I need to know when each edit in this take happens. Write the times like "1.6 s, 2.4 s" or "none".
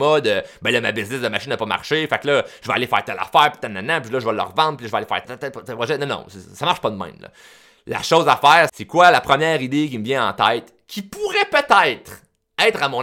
5.2 s, 8.7 s

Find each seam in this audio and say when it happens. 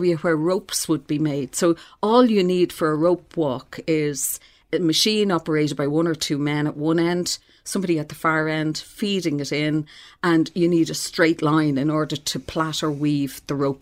none

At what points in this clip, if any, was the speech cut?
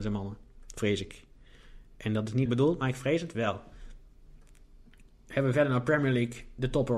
2.5 s

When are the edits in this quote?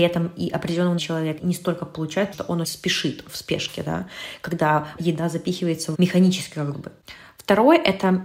1.0 s, 1.4 s, 2.3 s, 2.6 s, 3.3 s, 5.0 s, 5.9 s, 6.7 s

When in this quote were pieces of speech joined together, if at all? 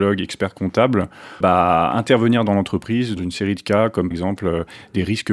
1.4 s, 3.2 s, 4.1 s

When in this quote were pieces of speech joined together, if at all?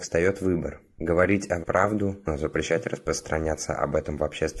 1.6 s

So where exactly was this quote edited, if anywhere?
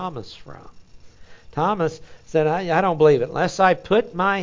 none

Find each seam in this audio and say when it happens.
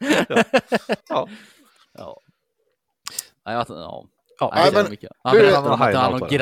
1.0 s, 5.1 s

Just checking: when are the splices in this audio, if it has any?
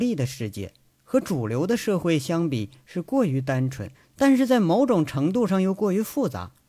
3.9 s

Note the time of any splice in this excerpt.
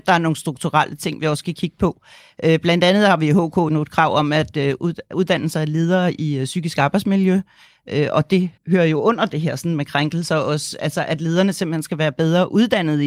3.7 s, 8.6 s

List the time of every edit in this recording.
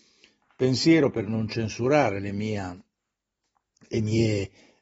none

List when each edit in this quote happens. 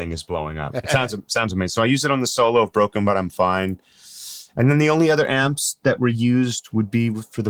none

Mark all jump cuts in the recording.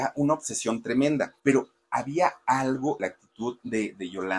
1.4 s, 3.0 s

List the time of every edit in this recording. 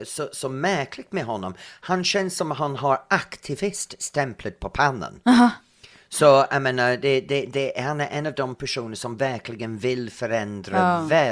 none

